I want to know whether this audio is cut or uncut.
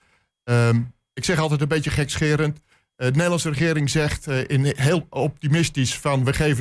uncut